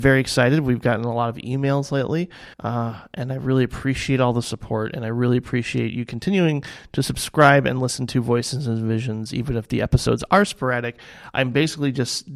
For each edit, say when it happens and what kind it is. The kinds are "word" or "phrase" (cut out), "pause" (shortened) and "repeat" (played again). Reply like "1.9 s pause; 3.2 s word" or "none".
2.5 s pause